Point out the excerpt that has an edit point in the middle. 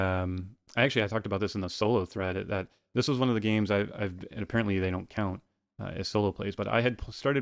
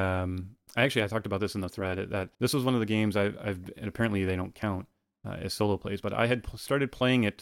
second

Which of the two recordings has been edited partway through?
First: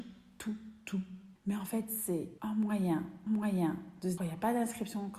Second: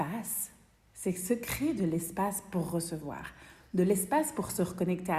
first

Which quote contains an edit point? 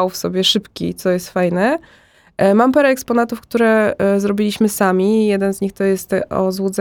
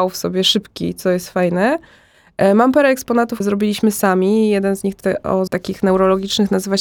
second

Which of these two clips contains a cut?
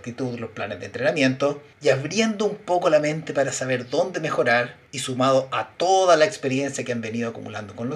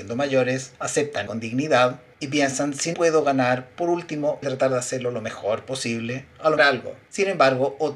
second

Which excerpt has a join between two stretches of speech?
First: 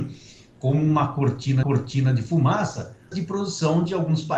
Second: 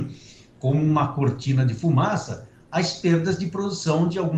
first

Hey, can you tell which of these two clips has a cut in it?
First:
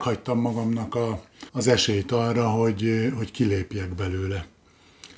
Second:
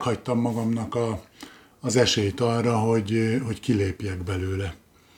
first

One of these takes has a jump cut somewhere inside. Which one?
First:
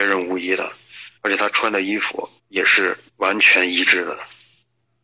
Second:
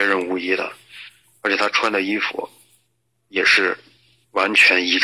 first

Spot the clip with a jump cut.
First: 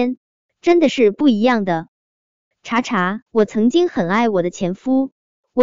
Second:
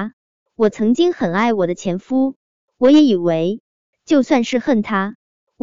first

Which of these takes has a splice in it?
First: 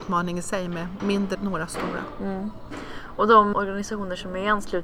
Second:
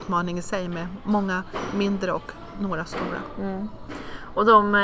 first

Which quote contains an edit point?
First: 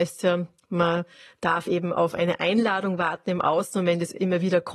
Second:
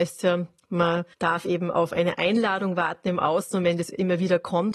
second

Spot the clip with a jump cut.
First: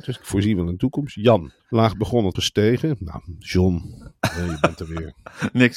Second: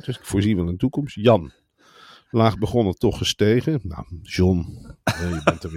first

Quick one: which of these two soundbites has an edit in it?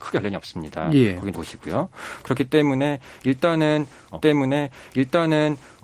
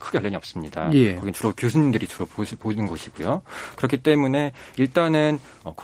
first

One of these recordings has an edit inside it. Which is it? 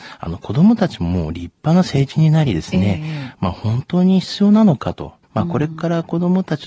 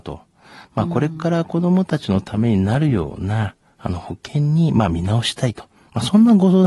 first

